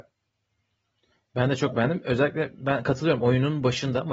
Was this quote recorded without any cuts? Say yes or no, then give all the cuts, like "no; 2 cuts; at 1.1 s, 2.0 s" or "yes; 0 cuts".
yes; 0 cuts